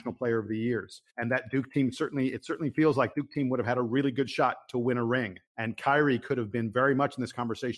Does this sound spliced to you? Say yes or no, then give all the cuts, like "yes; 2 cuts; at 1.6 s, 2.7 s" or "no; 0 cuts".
yes; 3 cuts; at 1.1 s, 3.1 s, 5.5 s